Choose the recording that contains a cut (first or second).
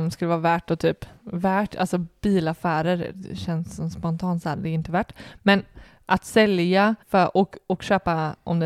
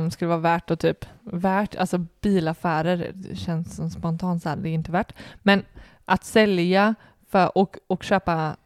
first